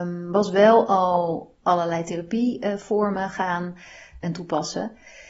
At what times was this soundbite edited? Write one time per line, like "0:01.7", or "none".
0:04.2